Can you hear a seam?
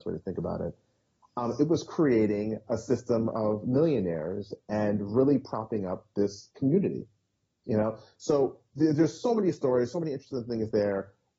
no; 0 cuts

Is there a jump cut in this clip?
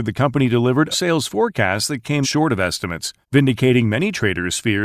yes; 3 cuts; at 0.9 s, 2.2 s, 3.2 s

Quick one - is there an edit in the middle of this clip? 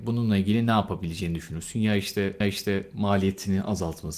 yes; 1 cut; at 2.4 s

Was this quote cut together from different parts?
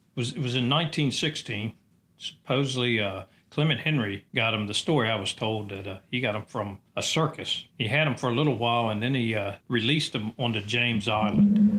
yes; 4 cuts; at 4.3 s, 6.9 s, 7.7 s, 9.6 s

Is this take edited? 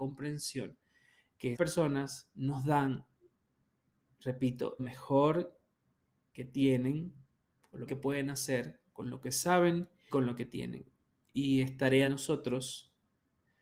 yes; 5 cuts; at 1.5 s, 4.8 s, 7.9 s, 10.1 s, 12.1 s

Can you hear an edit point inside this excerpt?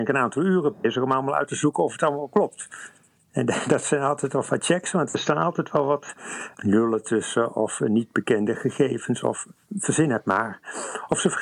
no; 0 cuts

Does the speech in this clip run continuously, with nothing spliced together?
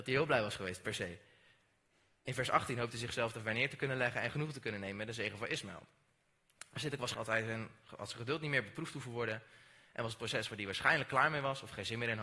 no; 1 cut; at 7.1 s

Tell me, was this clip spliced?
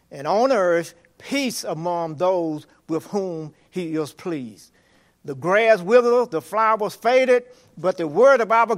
no; 0 cuts

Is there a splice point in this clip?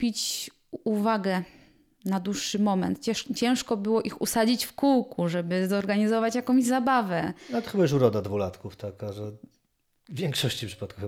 no; 0 cuts

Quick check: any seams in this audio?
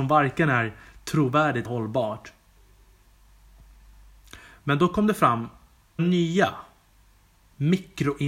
yes; 2 cuts; at 1.7 s, 6.0 s

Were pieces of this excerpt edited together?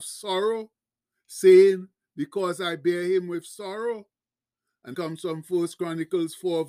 yes; 1 cut; at 4.9 s

